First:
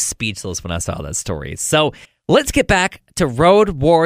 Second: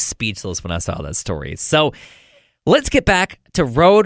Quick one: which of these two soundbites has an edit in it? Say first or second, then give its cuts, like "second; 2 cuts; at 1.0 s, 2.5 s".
first; 1 cut; at 2.0 s